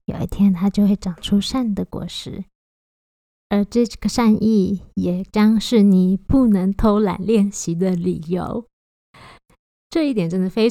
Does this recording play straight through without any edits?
yes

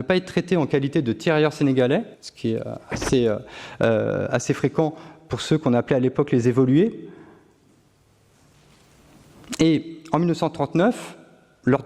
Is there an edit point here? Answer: yes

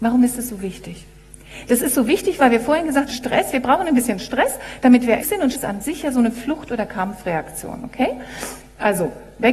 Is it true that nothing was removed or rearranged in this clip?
no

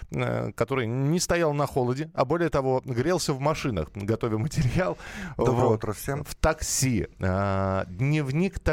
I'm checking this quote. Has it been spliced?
no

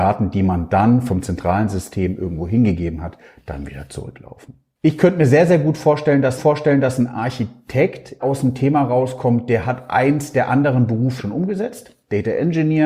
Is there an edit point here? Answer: yes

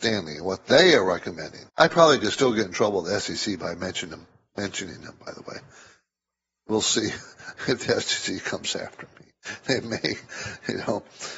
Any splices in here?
yes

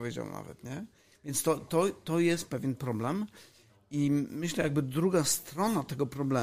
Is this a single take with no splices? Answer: yes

